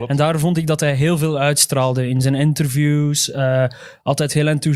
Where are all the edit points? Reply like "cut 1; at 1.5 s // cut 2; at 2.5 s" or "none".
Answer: none